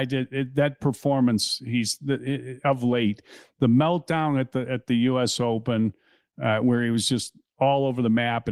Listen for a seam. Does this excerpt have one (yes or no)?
no